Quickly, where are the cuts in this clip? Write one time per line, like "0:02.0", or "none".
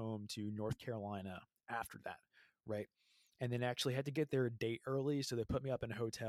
none